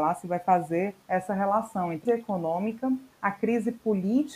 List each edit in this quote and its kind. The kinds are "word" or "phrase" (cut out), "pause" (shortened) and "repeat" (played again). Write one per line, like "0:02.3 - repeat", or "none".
0:01.0 - pause
0:02.1 - phrase
0:03.1 - pause